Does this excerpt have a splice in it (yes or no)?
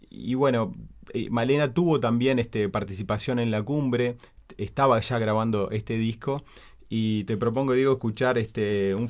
no